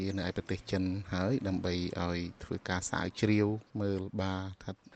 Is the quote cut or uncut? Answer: cut